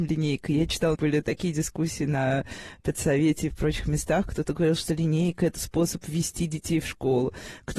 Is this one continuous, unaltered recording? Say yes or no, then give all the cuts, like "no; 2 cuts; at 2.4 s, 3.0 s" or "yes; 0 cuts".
no; 1 cut; at 0.9 s